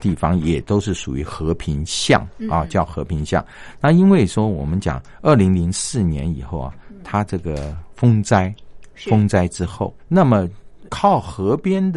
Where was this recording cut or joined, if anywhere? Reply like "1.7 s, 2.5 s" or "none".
10.0 s, 10.9 s